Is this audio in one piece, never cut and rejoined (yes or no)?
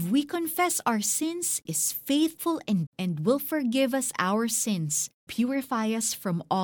no